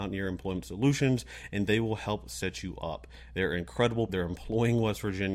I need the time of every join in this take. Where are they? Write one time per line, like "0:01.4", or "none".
0:04.1